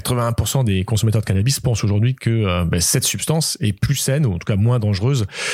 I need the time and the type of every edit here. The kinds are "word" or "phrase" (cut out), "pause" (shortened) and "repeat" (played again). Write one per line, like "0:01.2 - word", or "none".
none